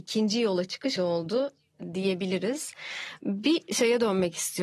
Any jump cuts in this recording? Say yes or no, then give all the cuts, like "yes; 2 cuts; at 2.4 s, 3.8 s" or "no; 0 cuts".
yes; 1 cut; at 1.0 s